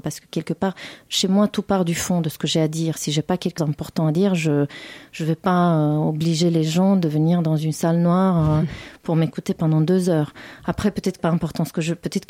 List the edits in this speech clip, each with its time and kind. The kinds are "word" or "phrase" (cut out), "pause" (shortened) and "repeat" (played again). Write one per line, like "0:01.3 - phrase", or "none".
0:03.6 - word
0:11.2 - word